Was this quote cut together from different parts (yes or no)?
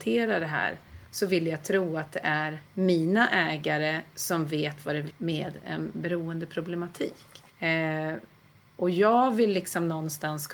yes